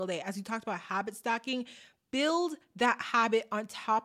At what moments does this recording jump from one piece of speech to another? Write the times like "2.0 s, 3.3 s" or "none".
none